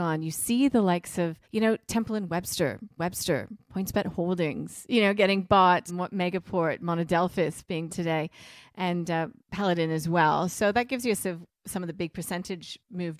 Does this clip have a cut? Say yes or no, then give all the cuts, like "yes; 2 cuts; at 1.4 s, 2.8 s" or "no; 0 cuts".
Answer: yes; 6 cuts; at 1.4 s, 3.0 s, 5.9 s, 7.9 s, 9.4 s, 11.2 s